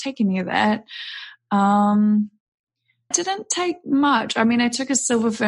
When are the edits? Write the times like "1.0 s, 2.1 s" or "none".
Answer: 3.1 s